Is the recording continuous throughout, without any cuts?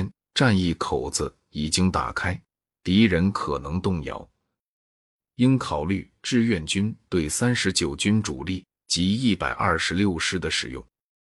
yes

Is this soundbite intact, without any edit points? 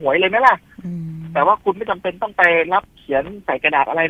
no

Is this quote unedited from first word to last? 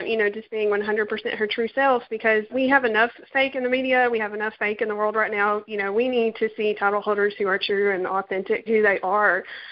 no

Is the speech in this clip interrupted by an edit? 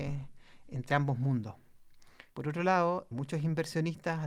yes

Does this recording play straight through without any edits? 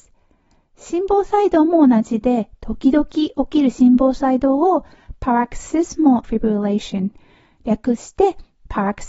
no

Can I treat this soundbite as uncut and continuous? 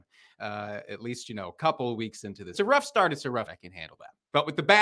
no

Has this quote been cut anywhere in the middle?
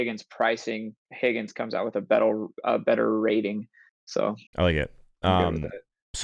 yes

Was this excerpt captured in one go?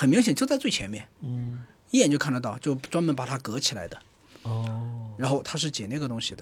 yes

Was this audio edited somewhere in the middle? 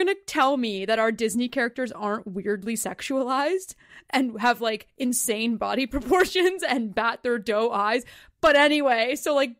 no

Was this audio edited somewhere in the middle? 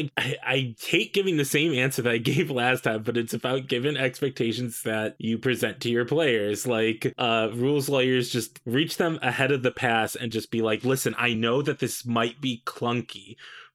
no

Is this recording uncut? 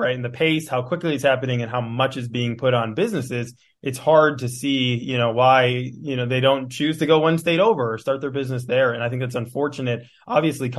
yes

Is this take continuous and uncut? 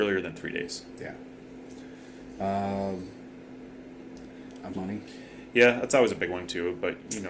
no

